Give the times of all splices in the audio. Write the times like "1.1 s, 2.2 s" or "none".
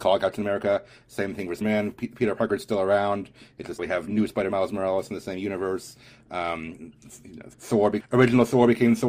1.6 s, 3.8 s, 4.5 s, 7.5 s, 8.0 s